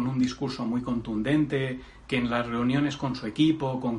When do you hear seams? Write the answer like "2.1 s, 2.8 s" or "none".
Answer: none